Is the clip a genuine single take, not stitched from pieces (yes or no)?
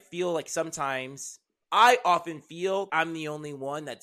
no